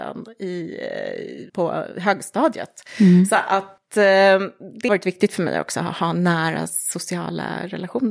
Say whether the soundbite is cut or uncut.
cut